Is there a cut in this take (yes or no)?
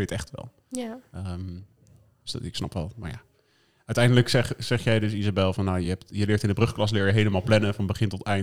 no